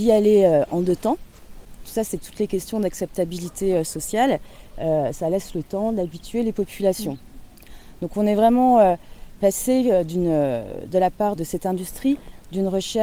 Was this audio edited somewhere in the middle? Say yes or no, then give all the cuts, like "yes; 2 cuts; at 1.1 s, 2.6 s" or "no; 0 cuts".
yes; 1 cut; at 11.4 s